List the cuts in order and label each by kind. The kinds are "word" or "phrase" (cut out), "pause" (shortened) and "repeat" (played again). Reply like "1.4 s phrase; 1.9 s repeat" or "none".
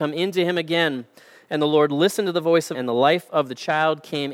2.7 s word